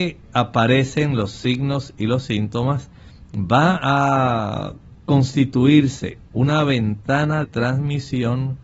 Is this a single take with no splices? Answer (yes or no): no